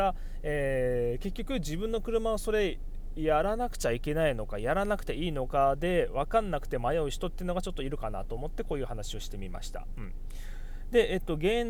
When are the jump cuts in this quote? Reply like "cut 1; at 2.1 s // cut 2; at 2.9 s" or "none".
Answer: none